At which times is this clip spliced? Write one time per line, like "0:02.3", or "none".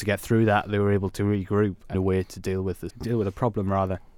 0:01.9
0:02.9